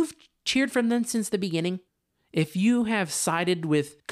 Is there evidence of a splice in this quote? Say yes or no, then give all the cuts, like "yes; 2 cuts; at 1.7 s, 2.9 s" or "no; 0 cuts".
no; 0 cuts